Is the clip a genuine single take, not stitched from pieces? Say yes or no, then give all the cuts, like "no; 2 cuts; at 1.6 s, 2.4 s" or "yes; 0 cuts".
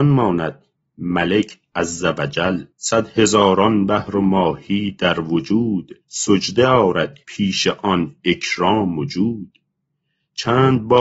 no; 3 cuts; at 2.7 s, 6.0 s, 7.2 s